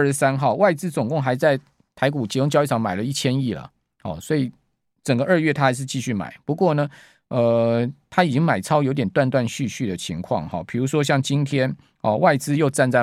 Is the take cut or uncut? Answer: uncut